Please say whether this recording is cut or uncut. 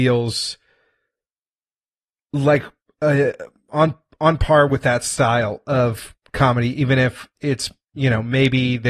uncut